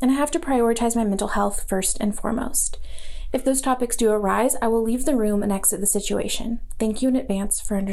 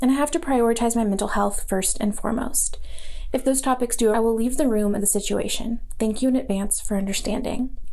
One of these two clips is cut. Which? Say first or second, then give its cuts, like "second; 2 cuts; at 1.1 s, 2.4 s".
second; 2 cuts; at 4.1 s, 5.0 s